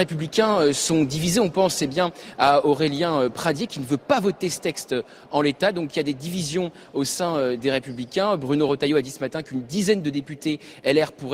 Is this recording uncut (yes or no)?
yes